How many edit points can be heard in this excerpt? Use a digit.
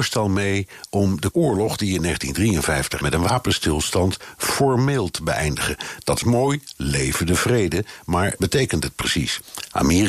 4